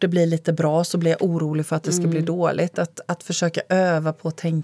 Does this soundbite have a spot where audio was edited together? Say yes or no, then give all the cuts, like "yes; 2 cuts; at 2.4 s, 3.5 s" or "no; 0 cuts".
no; 0 cuts